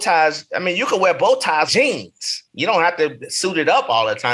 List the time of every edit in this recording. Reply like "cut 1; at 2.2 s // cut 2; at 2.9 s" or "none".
cut 1; at 1.7 s